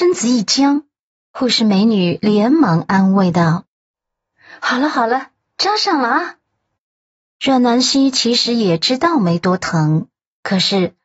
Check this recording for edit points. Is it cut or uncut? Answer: uncut